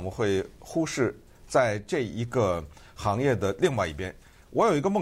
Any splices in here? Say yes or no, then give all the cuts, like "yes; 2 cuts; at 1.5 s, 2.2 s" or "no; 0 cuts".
no; 0 cuts